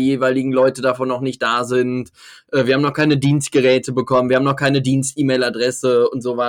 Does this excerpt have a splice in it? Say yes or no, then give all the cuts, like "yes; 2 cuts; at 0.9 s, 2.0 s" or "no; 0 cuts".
no; 0 cuts